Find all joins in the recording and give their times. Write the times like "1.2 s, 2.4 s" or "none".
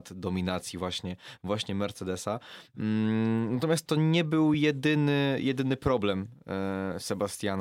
none